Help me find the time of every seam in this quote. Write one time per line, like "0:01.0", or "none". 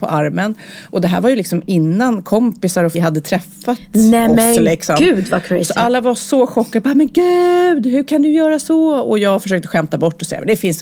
0:02.9